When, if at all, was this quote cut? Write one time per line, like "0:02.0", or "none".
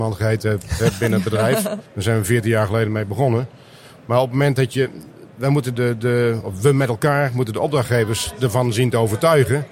0:01.9
0:05.8